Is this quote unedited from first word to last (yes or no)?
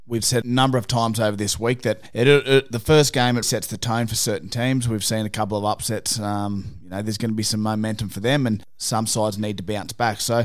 no